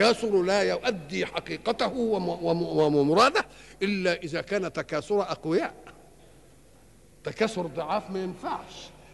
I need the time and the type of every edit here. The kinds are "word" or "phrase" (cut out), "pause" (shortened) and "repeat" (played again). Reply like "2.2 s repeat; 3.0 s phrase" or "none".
none